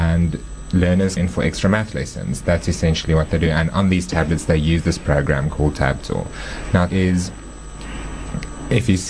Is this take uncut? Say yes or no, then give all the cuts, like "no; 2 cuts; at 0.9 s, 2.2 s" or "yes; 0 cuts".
no; 2 cuts; at 1.2 s, 6.9 s